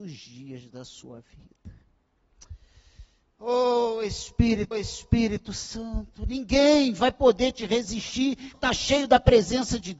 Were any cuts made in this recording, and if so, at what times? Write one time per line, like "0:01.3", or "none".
0:04.7
0:08.5